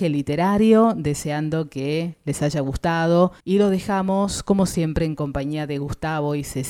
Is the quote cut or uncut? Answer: cut